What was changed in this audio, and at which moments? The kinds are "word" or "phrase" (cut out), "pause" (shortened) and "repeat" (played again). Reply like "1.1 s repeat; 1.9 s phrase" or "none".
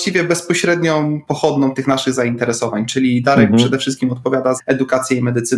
4.6 s word